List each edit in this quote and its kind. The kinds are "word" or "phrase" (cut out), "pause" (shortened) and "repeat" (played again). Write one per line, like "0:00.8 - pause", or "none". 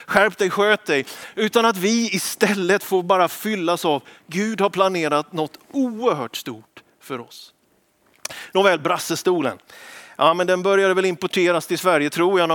none